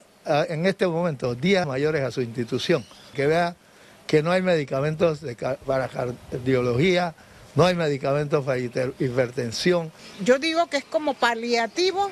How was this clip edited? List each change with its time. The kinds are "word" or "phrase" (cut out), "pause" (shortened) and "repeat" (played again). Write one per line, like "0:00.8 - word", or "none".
0:01.6 - word
0:03.1 - word